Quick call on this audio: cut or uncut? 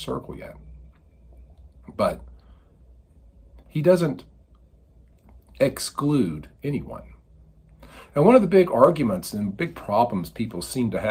uncut